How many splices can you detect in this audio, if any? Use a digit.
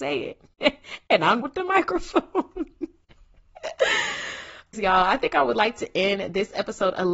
2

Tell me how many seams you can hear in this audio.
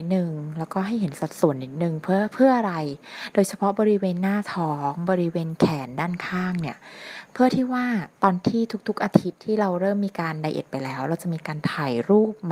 1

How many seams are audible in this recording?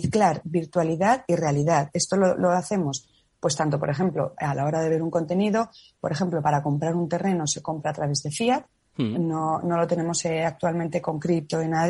0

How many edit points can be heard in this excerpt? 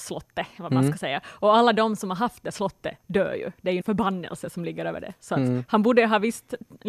1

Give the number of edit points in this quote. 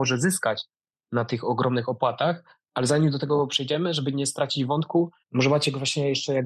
2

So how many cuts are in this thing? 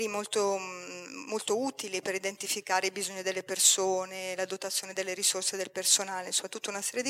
0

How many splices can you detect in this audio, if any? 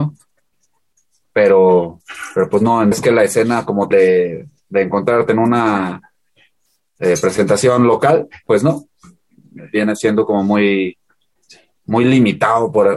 2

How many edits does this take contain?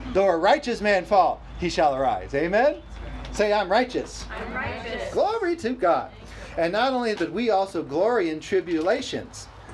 1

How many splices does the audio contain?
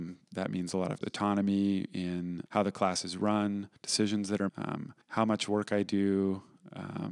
5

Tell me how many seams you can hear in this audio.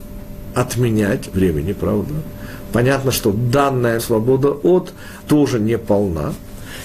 3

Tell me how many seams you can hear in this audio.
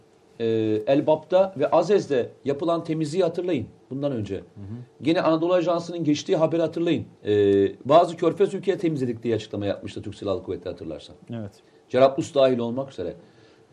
2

